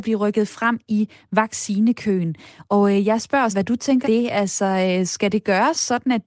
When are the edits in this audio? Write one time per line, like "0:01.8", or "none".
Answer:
0:03.5
0:04.0